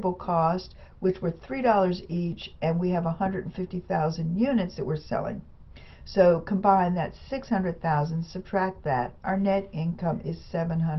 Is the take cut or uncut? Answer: uncut